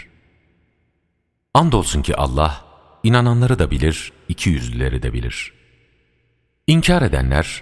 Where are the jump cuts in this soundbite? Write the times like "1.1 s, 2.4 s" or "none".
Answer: none